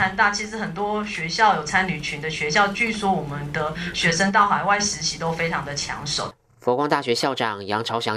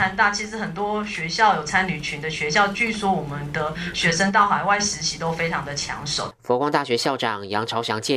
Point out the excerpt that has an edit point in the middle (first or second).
second